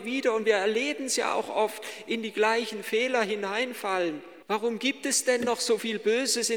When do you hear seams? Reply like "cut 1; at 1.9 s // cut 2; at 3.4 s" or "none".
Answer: cut 1; at 4.4 s